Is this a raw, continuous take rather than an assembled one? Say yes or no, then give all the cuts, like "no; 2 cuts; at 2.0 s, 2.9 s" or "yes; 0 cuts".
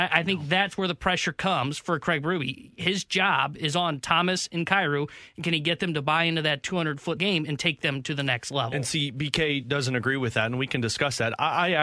no; 1 cut; at 7.2 s